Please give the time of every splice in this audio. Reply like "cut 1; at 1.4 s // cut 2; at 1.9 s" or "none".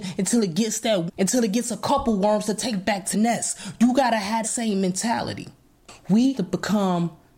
cut 1; at 1.1 s // cut 2; at 3.1 s // cut 3; at 4.4 s // cut 4; at 6.3 s

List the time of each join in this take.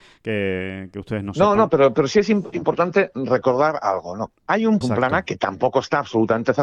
cut 1; at 4.8 s

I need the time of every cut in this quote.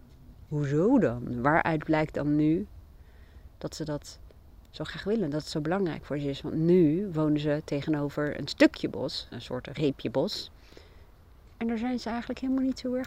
cut 1; at 9.3 s

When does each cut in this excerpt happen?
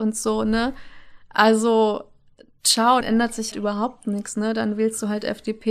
cut 1; at 3.0 s // cut 2; at 3.5 s

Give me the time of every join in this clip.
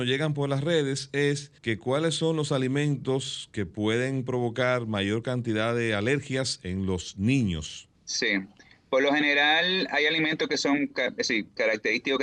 cut 1; at 1.6 s // cut 2; at 7.9 s

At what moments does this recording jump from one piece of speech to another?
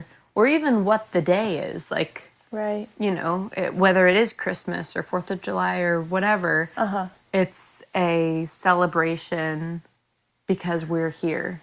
none

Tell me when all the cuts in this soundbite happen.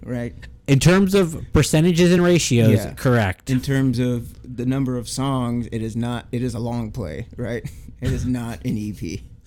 none

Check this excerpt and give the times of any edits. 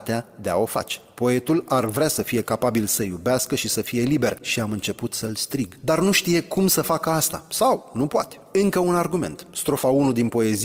none

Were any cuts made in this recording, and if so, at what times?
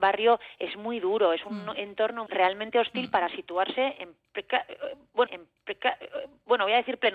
cut 1; at 2.3 s // cut 2; at 5.3 s

